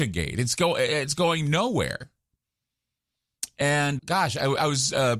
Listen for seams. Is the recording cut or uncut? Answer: cut